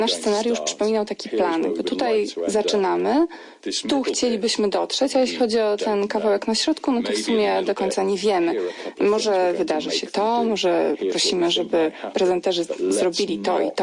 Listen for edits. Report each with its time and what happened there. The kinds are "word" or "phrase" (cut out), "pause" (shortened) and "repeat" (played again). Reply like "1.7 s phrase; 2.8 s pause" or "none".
none